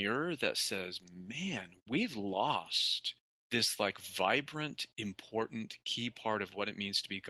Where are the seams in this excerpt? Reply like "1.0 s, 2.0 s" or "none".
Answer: none

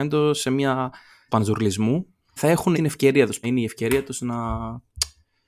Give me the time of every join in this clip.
1.3 s, 2.4 s, 2.7 s, 3.4 s

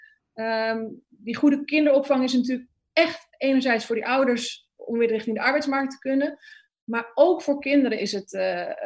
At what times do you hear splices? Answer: none

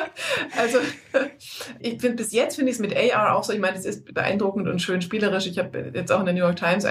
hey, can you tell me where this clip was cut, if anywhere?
none

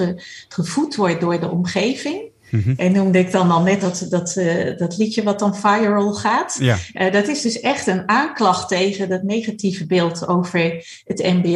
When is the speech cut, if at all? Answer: 3.8 s

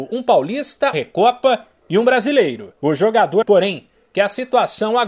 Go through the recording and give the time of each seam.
0.9 s, 2.8 s, 3.4 s

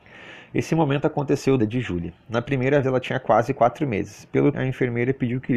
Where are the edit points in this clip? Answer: 1.6 s, 2.8 s, 4.5 s

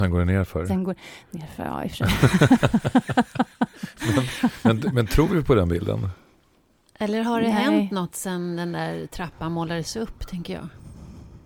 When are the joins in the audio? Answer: none

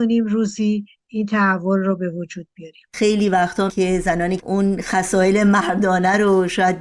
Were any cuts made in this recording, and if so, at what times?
3.7 s, 4.4 s

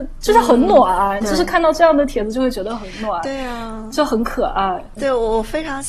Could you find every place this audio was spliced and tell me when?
5.0 s

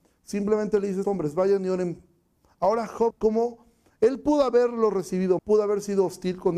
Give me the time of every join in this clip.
1.0 s, 3.1 s, 5.4 s

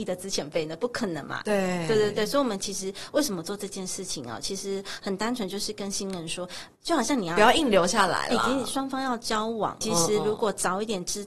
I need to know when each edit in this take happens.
9.8 s

